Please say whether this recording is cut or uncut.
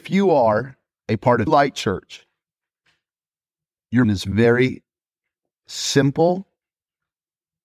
cut